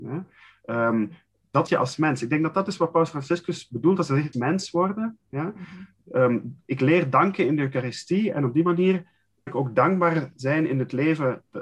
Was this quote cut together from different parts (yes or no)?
yes